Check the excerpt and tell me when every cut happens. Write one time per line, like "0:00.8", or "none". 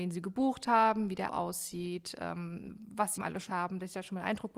0:01.3
0:03.2
0:03.5